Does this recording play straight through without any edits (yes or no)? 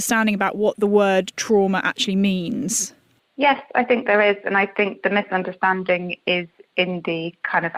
yes